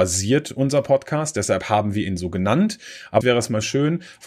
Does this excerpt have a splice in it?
yes; 1 cut; at 3.2 s

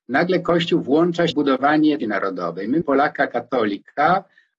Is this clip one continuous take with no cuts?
no; 3 cuts; at 1.3 s, 2.0 s, 2.8 s

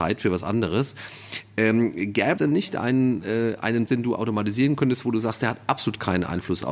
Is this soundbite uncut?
no; 2 cuts; at 2.4 s, 3.9 s

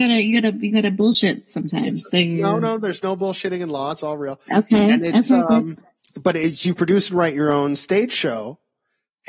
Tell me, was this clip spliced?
yes; 1 cut; at 5.9 s

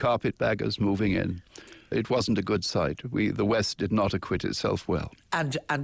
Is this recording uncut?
no; 1 cut; at 1.9 s

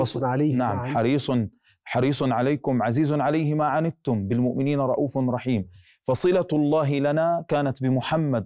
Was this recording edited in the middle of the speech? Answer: no; 0 cuts

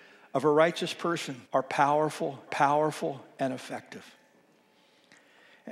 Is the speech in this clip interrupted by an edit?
yes; 2 cuts; at 1.4 s, 2.5 s

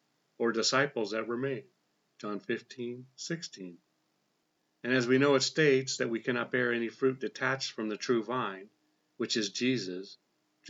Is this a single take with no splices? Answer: yes; 0 cuts

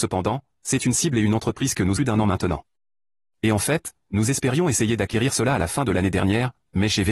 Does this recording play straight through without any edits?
no; 1 cut; at 2.0 s

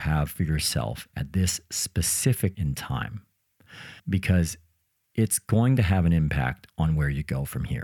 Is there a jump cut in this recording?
yes; 2 cuts; at 2.5 s, 4.0 s

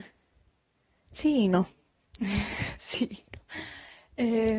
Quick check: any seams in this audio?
no; 0 cuts

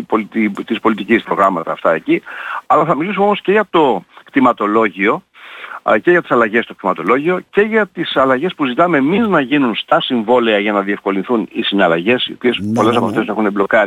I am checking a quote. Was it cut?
yes; 1 cut; at 1.2 s

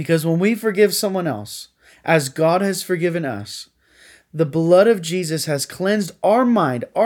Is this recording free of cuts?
yes; 0 cuts

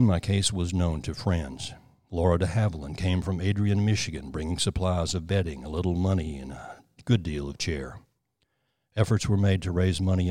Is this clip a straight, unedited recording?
yes; 0 cuts

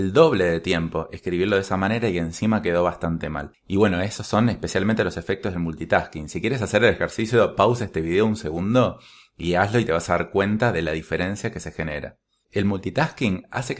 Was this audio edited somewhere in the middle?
no; 0 cuts

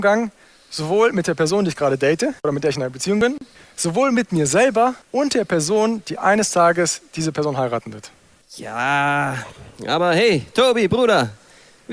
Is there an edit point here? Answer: yes; 4 cuts; at 2.4 s, 3.6 s, 5.0 s, 8.4 s

